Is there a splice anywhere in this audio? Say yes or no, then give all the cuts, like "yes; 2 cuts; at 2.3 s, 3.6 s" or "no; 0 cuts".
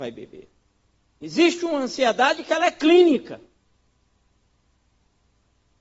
no; 0 cuts